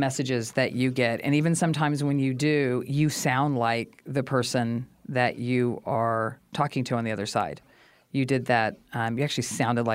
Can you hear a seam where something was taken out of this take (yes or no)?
no